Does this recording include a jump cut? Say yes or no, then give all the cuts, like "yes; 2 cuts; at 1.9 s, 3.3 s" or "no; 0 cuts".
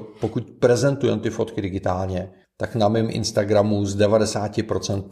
yes; 1 cut; at 2.4 s